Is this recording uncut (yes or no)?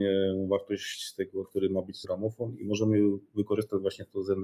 no